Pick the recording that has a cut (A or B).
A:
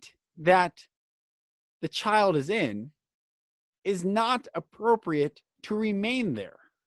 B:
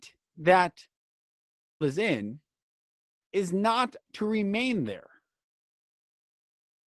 B